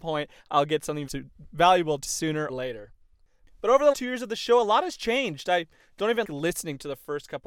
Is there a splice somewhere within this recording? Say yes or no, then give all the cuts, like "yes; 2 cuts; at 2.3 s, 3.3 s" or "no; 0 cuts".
yes; 5 cuts; at 1.1 s, 2.1 s, 2.5 s, 3.9 s, 6.2 s